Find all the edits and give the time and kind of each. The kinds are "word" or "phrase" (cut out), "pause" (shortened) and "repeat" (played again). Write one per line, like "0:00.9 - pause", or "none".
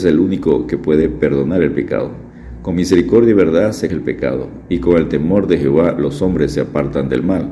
0:03.9 - word